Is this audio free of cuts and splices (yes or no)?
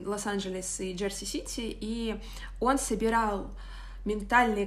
yes